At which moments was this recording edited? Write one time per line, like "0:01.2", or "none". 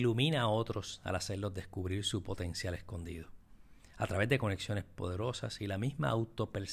none